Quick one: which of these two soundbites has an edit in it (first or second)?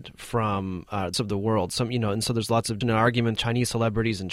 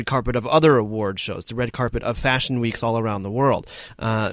first